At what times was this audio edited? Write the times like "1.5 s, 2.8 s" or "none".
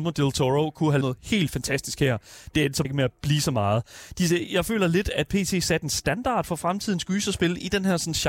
1.0 s, 2.8 s